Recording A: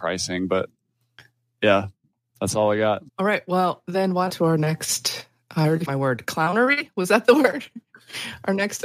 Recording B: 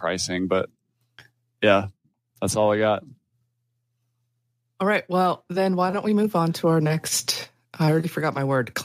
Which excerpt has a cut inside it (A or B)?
A